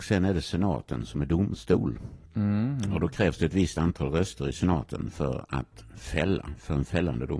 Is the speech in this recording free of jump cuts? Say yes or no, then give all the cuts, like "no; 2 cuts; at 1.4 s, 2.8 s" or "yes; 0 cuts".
yes; 0 cuts